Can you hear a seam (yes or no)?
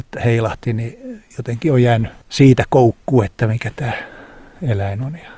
no